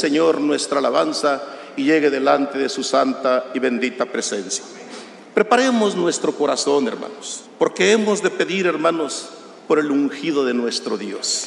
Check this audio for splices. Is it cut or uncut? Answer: cut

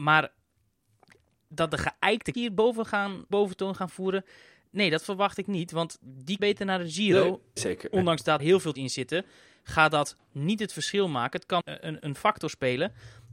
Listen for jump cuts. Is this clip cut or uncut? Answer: cut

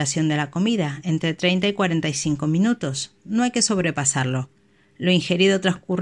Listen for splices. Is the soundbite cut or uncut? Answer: uncut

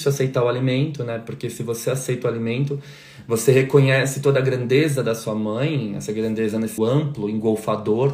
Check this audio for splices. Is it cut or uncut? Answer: cut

